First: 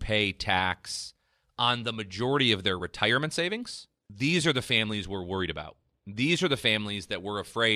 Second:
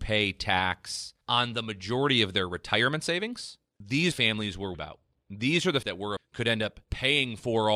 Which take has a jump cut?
second; 6 cuts; at 1.2 s, 4.1 s, 4.7 s, 5.8 s, 6.2 s, 6.8 s

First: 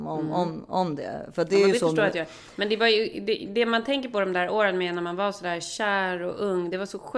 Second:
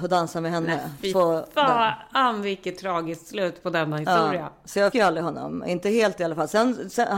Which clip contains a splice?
second; 2 cuts; at 1.1 s, 4.9 s

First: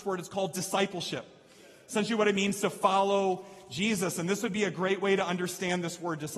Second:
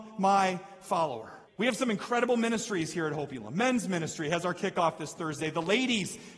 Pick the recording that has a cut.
second; 1 cut; at 1.5 s

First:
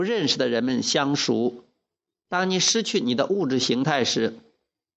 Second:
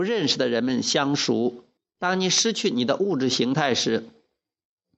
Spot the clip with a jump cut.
second; 1 cut; at 1.8 s

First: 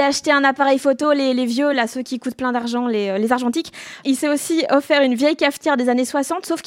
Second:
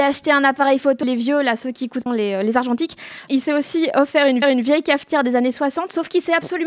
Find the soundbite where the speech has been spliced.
second; 3 cuts; at 1.0 s, 2.1 s, 4.4 s

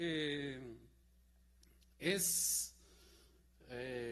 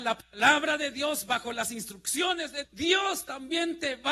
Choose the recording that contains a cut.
second; 1 cut; at 2.6 s

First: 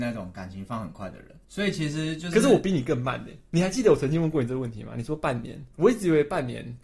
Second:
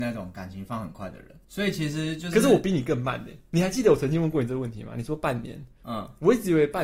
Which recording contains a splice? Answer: first; 1 cut; at 5.7 s

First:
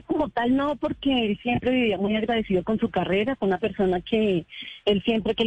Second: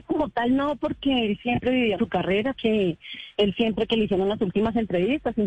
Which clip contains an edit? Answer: second; 2 cuts; at 2.0 s, 2.5 s

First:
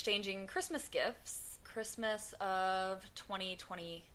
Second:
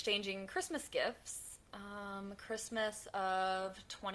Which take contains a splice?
first; 1 cut; at 1.6 s

